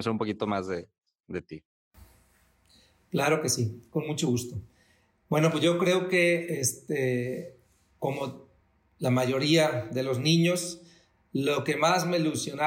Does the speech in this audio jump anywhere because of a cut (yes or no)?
no